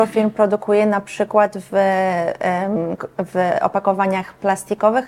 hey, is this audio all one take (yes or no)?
yes